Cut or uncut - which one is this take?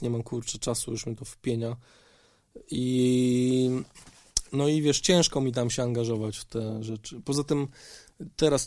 uncut